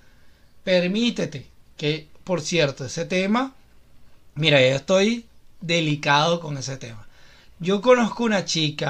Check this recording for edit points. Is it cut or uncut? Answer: uncut